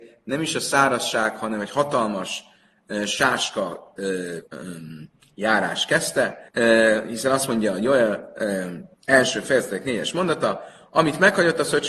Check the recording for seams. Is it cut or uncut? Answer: cut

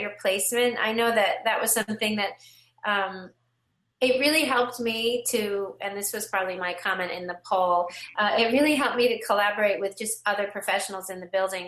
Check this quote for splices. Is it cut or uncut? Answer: uncut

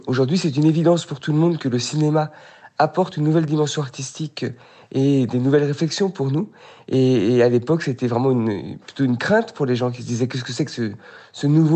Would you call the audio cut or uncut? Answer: uncut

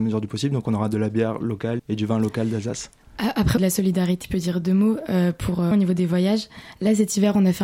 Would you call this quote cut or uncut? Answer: cut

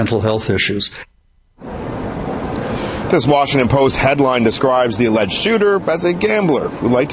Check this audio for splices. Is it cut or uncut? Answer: uncut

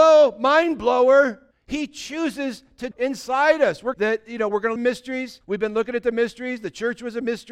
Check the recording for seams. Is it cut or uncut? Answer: cut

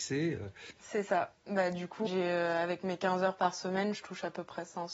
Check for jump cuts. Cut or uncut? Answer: cut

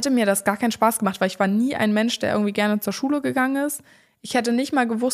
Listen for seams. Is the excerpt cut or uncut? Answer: uncut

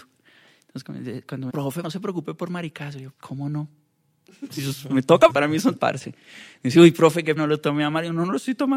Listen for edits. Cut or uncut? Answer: cut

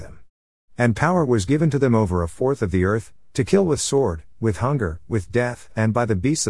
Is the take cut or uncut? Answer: uncut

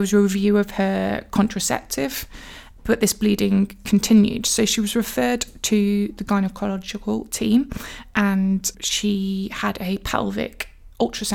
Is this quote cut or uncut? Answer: cut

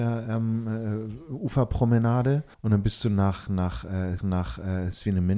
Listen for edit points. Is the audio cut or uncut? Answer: cut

